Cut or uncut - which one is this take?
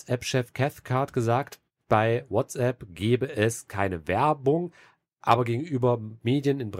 uncut